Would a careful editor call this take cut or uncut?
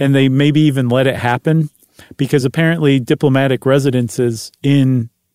uncut